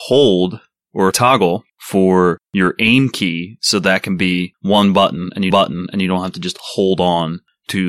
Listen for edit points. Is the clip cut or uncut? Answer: cut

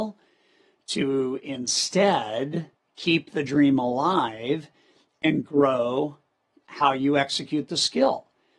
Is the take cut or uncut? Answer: uncut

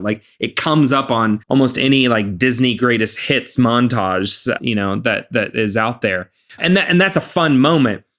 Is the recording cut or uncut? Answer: cut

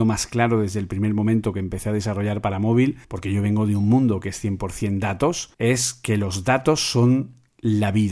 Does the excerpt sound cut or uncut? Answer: cut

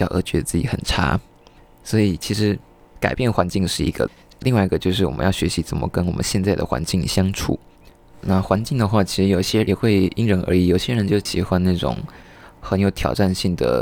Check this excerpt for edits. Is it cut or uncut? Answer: uncut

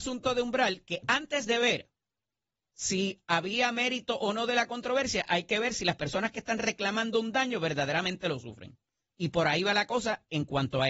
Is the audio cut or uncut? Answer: uncut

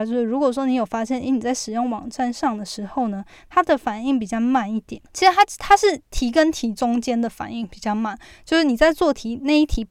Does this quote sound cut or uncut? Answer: cut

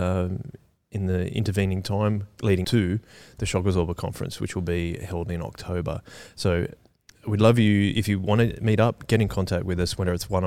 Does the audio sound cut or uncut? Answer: cut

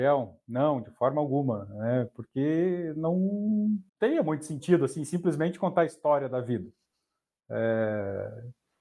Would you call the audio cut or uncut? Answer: cut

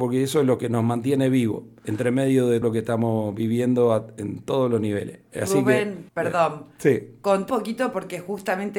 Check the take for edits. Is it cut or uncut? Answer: cut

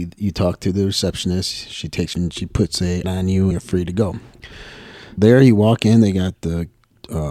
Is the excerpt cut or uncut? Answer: cut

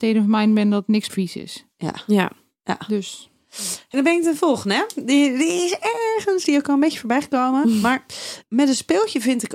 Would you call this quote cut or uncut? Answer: cut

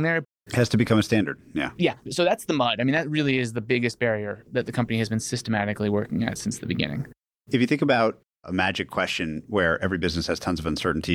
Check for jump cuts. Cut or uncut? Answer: uncut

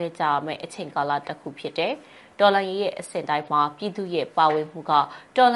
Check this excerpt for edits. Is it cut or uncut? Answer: uncut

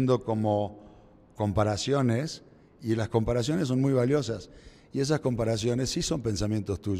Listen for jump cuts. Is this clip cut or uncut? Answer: uncut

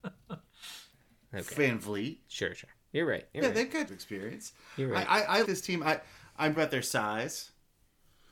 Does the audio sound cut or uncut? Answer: cut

